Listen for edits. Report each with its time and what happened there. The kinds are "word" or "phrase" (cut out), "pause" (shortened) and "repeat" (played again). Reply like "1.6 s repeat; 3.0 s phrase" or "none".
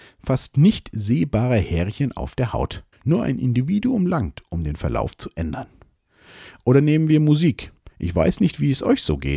2.9 s pause; 7.9 s pause